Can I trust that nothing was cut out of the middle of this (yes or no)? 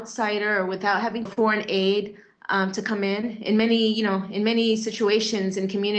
no